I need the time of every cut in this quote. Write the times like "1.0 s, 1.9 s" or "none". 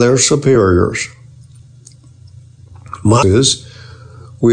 3.2 s